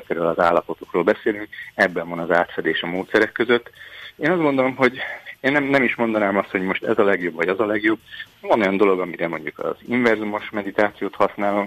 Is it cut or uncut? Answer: uncut